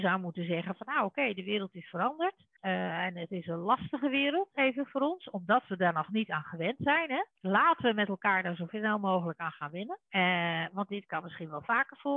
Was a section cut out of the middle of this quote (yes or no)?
yes